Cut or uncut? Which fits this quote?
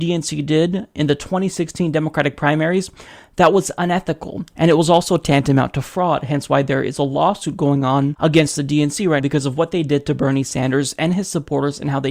cut